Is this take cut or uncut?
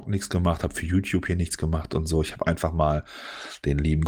uncut